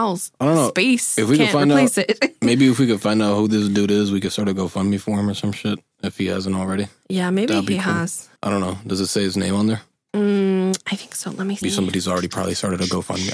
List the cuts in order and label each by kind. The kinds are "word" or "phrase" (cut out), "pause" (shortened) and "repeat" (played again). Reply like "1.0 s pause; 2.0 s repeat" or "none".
8.4 s pause; 11.6 s word